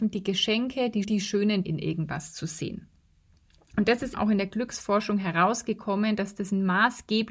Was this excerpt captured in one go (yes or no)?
no